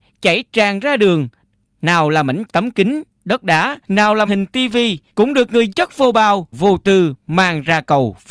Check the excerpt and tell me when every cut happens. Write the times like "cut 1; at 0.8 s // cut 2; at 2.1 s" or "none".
cut 1; at 2.5 s // cut 2; at 3.8 s // cut 3; at 4.3 s // cut 4; at 5.1 s // cut 5; at 5.7 s // cut 6; at 6.5 s